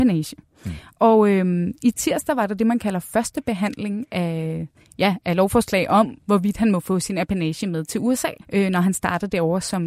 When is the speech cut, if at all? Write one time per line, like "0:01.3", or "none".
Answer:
0:08.4